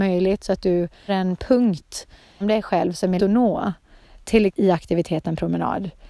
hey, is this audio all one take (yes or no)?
no